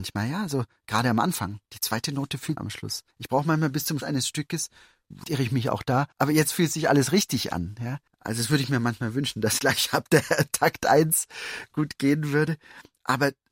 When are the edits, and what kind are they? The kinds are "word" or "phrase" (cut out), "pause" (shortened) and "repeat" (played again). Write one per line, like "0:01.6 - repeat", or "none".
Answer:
0:01.6 - pause
0:02.6 - phrase
0:03.1 - pause
0:04.0 - word
0:05.2 - phrase
0:06.1 - pause
0:08.1 - pause
0:09.6 - word